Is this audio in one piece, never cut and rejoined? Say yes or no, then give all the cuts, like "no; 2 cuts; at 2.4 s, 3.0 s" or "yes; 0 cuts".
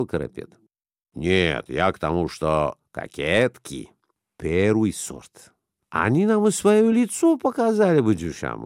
yes; 0 cuts